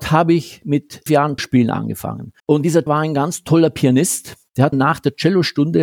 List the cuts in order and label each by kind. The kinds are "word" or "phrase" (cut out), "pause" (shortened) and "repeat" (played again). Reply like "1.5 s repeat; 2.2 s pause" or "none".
1.1 s word; 1.4 s word; 2.4 s pause; 2.9 s word; 4.7 s phrase